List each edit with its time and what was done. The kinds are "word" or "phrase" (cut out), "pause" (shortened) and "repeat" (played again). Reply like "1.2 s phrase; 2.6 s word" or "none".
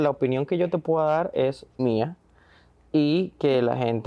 1.8 s word